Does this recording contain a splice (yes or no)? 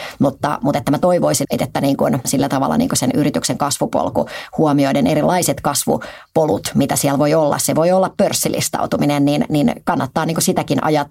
yes